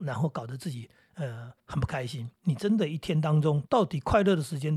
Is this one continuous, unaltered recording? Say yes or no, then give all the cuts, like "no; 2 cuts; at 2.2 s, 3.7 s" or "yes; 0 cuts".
no; 3 cuts; at 1.6 s, 2.4 s, 3.7 s